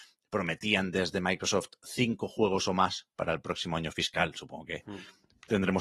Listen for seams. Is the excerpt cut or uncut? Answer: uncut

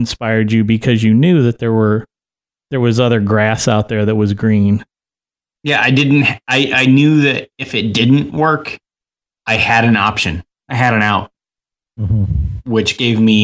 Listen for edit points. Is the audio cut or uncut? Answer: uncut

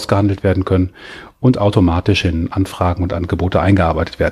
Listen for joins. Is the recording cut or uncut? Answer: uncut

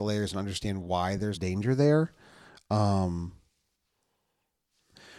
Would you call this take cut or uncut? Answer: cut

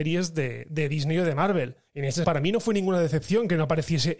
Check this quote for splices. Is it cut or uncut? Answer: cut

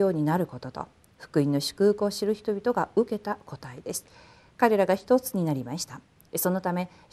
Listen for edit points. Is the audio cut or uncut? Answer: uncut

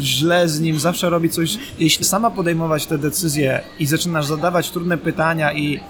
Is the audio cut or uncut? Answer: cut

